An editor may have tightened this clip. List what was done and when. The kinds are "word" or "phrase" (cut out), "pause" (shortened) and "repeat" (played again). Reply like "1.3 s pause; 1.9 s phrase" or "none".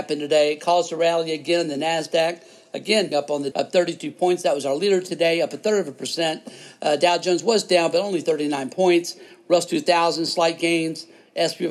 3.1 s word; 3.5 s word